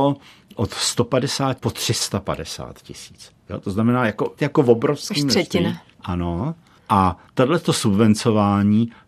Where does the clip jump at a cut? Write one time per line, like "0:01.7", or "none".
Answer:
0:01.6
0:04.4
0:05.9
0:07.3